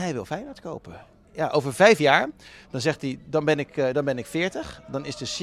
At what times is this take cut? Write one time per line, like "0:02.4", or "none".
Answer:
none